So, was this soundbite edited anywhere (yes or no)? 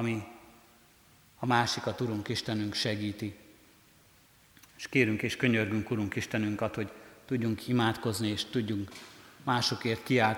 no